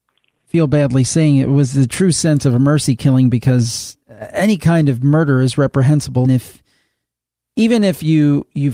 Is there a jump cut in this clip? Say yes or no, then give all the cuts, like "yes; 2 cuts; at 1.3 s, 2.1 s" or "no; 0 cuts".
yes; 2 cuts; at 4.0 s, 6.2 s